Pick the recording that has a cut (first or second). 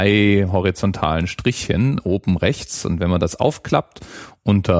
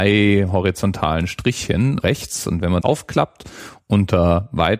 second